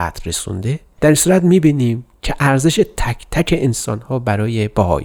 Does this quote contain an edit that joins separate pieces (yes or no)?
no